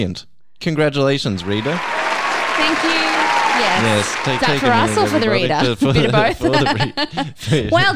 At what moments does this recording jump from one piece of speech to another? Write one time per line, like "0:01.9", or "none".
0:04.4